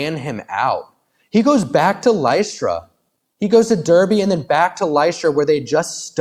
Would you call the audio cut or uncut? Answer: uncut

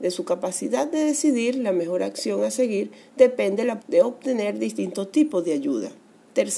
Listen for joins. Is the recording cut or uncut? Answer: cut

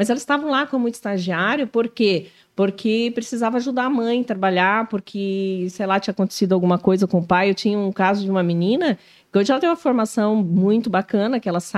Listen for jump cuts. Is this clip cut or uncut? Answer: uncut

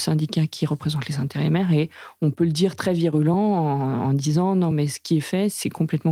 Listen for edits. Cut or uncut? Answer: uncut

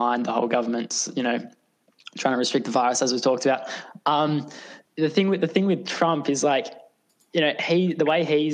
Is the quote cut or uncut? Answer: cut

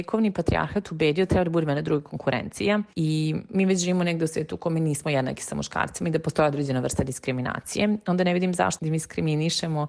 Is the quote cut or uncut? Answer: uncut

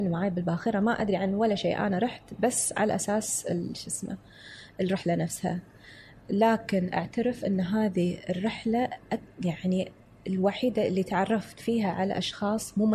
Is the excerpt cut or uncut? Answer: uncut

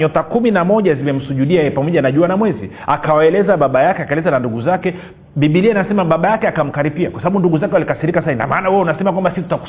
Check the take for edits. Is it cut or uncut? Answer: uncut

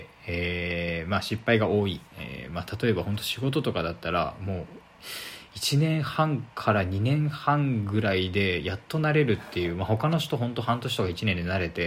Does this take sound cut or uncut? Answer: cut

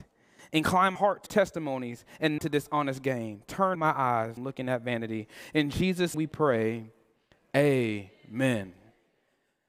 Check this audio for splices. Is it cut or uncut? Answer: cut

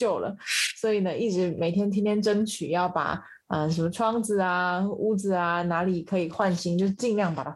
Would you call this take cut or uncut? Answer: uncut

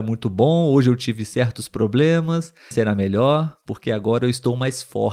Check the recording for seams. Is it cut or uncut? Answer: cut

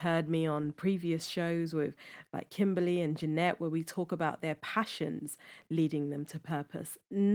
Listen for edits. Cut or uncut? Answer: uncut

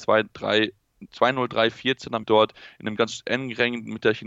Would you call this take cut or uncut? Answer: cut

